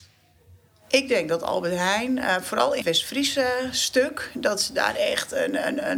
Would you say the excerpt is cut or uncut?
cut